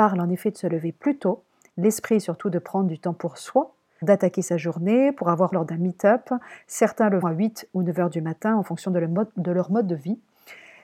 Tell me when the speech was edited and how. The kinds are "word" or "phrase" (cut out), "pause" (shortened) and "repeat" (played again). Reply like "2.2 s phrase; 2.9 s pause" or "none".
4.0 s word; 5.5 s phrase; 7.2 s word